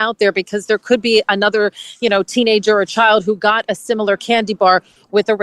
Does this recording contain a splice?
no; 0 cuts

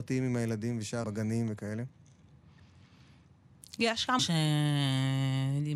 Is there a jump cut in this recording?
yes; 2 cuts; at 1.0 s, 4.2 s

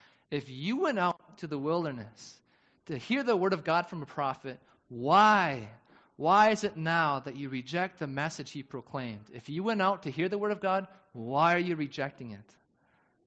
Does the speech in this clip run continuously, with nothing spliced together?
yes; 0 cuts

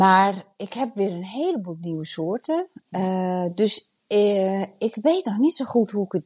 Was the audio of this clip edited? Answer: yes; 1 cut; at 4.0 s

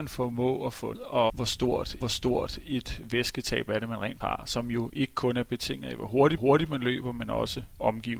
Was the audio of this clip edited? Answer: yes; 5 cuts; at 0.9 s, 1.3 s, 2.0 s, 4.2 s, 6.4 s

